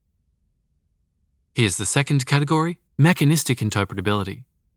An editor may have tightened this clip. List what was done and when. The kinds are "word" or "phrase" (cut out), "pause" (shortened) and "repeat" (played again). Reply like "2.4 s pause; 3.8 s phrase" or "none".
2.9 s pause